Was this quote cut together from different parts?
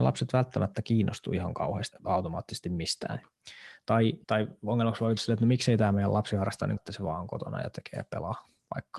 yes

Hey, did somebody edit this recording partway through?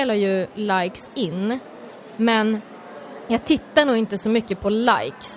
no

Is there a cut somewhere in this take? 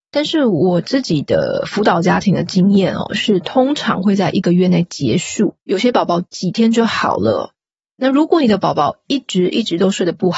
yes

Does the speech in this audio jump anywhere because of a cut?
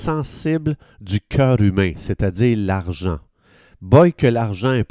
no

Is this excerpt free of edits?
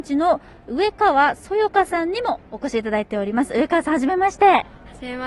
no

